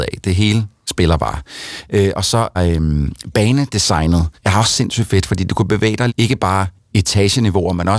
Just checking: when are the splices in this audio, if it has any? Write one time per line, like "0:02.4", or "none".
0:02.5
0:04.3
0:06.1